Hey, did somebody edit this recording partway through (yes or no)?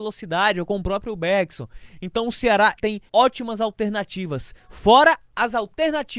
yes